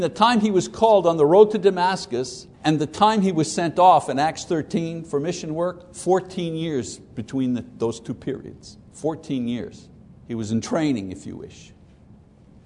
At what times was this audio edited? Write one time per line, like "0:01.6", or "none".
0:02.5
0:08.9
0:10.0